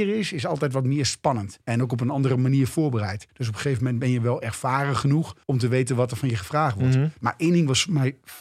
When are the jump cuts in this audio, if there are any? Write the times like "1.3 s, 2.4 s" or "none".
1.6 s, 3.3 s, 5.4 s